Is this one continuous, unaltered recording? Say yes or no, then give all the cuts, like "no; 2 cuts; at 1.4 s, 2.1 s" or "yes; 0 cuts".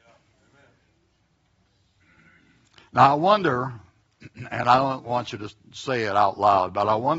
yes; 0 cuts